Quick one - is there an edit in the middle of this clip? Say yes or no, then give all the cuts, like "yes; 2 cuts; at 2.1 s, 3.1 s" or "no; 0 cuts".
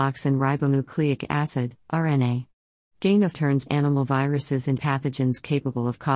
yes; 3 cuts; at 3.3 s, 3.7 s, 4.8 s